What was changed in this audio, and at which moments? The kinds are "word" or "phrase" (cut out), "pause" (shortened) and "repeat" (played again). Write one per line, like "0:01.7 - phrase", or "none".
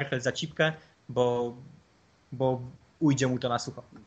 none